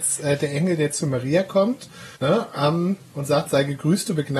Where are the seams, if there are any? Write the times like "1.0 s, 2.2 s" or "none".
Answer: 2.2 s